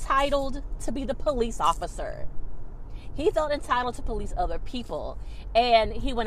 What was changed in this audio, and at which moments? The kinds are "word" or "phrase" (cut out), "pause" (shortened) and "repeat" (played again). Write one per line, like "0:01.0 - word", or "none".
none